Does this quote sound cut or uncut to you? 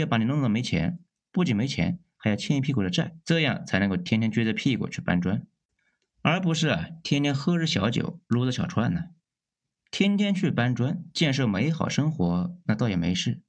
cut